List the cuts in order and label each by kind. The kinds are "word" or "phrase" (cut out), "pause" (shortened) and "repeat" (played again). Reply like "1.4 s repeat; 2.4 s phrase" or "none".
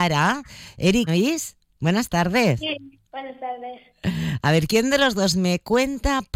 1.1 s phrase; 3.0 s pause